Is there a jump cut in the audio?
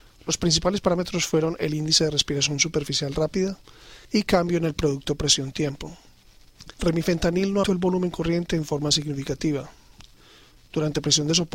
yes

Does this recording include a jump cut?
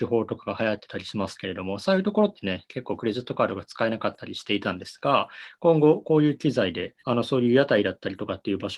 yes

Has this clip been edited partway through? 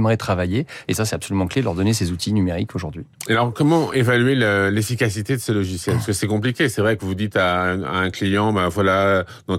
no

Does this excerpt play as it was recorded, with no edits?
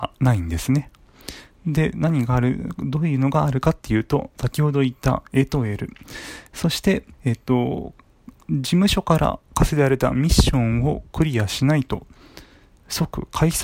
no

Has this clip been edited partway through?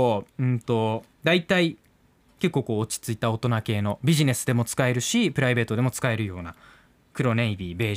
yes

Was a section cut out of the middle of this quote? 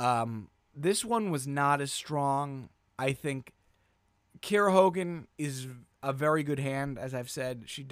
yes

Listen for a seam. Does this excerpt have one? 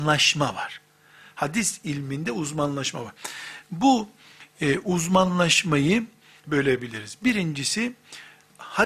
yes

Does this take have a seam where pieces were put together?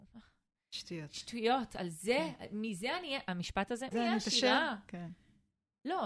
yes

